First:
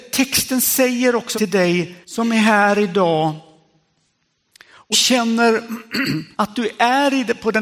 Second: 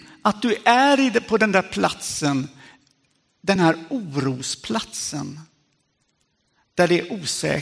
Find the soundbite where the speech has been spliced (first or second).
first